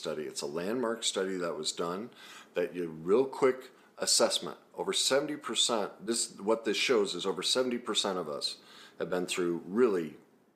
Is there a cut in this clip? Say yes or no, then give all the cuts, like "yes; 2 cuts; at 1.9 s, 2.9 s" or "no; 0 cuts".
no; 0 cuts